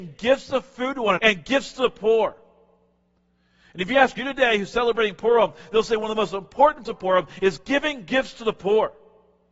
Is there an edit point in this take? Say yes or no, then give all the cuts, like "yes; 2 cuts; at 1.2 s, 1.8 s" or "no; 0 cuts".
yes; 3 cuts; at 1.2 s, 4.2 s, 6.8 s